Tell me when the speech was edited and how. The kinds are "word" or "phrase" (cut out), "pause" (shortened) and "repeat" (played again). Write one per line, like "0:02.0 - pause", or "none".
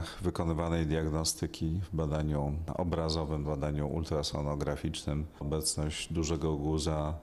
0:03.4 - word
0:05.4 - word